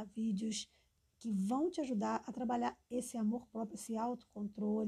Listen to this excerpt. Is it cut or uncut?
cut